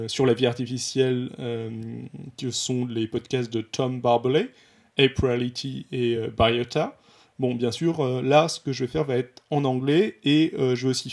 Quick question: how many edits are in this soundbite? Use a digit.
0